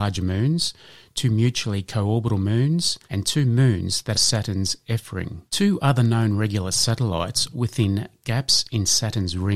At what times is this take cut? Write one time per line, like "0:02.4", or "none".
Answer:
0:03.0
0:04.1
0:05.5
0:07.5